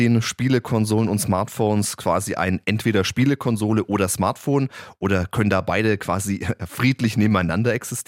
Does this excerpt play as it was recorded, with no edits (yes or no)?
yes